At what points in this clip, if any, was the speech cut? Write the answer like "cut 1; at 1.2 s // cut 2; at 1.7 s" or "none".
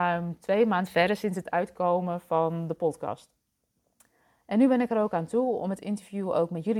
none